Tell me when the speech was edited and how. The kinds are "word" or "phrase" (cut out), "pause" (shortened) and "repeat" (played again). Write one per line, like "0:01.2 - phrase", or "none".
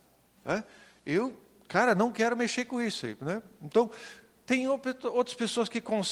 none